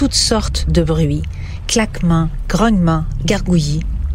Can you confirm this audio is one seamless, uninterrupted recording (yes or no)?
yes